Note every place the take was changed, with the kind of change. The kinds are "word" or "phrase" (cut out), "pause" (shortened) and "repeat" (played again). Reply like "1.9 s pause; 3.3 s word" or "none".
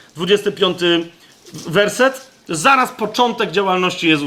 none